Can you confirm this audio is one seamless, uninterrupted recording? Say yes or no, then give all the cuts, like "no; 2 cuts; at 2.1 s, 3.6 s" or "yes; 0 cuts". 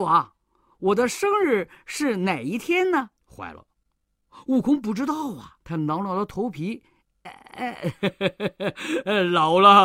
no; 3 cuts; at 3.2 s, 5.6 s, 7.2 s